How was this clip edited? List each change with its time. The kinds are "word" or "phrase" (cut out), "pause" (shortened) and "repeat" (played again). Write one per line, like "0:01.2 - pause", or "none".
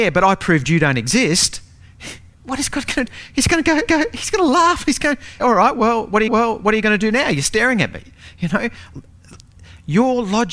0:02.3 - pause
0:03.1 - word
0:03.9 - repeat
0:05.4 - word
0:06.3 - repeat
0:07.4 - word